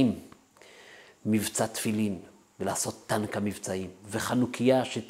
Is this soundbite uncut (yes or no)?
yes